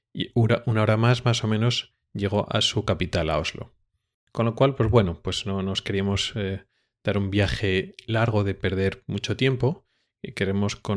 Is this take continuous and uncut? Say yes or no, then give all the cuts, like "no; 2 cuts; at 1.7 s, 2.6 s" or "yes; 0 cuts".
yes; 0 cuts